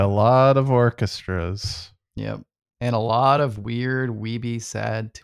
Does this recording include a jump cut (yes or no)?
no